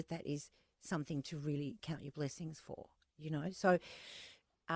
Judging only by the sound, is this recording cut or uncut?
uncut